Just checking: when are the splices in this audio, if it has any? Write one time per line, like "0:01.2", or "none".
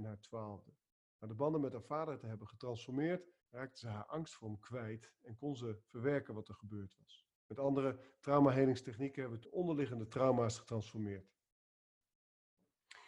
0:03.4
0:07.4
0:09.4